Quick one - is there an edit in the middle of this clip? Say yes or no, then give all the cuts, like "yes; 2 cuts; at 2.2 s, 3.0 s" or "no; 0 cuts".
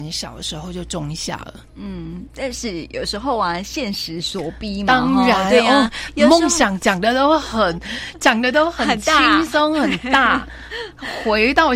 no; 0 cuts